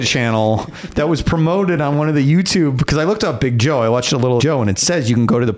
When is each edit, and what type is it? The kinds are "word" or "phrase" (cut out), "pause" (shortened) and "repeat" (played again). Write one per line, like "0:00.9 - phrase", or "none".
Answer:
0:04.4 - phrase

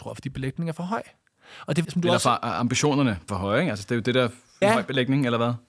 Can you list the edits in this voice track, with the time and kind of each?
0:01.8 - word
0:03.3 - word
0:04.6 - word

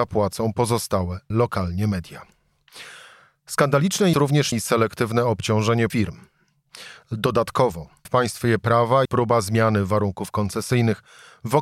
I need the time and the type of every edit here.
0:01.3 - word
0:04.1 - word
0:04.5 - word
0:05.9 - word
0:08.0 - word
0:09.0 - word

